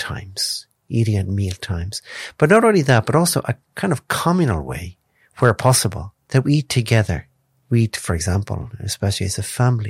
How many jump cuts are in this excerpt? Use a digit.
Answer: 0